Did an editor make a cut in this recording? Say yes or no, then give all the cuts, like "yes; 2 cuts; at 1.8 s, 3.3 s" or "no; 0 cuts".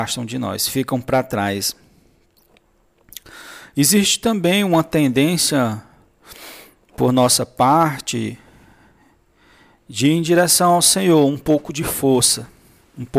no; 0 cuts